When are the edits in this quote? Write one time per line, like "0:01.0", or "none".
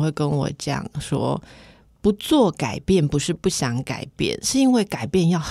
none